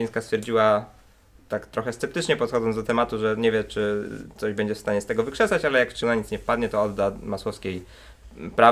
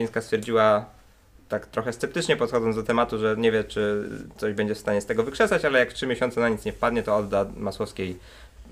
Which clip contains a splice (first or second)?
first